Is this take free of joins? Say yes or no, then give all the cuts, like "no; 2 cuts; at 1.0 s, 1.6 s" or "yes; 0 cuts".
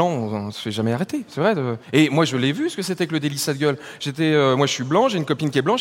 no; 1 cut; at 1.8 s